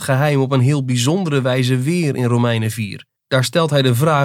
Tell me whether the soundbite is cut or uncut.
cut